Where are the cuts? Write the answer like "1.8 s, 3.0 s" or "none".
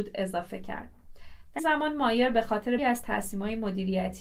1.6 s, 2.8 s